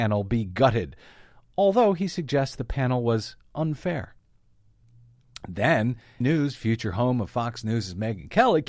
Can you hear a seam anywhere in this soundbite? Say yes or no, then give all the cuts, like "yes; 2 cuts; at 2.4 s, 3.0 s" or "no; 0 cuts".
yes; 1 cut; at 6.2 s